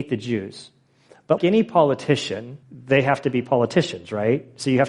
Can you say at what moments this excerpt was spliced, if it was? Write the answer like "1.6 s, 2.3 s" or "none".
1.4 s, 2.6 s